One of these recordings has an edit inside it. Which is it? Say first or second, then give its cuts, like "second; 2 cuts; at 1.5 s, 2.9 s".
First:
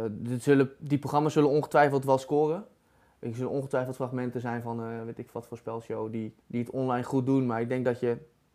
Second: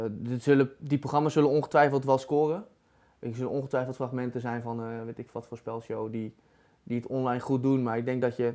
first; 1 cut; at 6.4 s